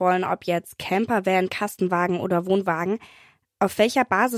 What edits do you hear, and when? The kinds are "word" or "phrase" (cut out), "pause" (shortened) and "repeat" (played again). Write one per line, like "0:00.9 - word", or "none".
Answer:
none